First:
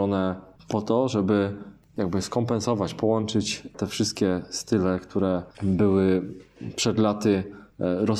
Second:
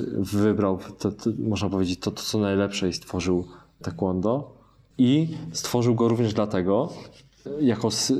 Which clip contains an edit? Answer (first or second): first